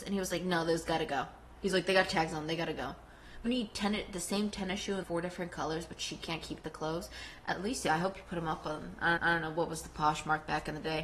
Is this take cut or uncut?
cut